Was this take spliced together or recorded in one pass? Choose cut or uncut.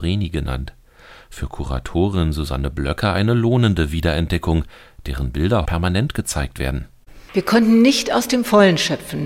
cut